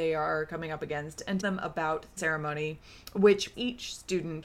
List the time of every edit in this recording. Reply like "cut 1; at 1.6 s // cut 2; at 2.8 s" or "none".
cut 1; at 1.4 s // cut 2; at 2.2 s // cut 3; at 3.5 s